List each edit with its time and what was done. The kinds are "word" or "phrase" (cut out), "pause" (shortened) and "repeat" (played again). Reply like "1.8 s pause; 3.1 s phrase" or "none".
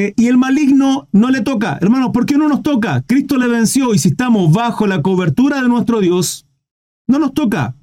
none